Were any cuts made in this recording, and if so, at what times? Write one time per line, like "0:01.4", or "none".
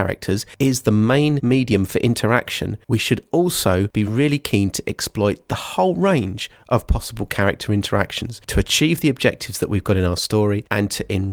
none